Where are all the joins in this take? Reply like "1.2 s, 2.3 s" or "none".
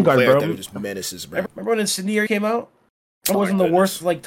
1.5 s, 2.3 s, 3.3 s